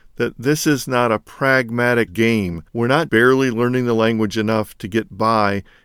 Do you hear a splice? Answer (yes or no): yes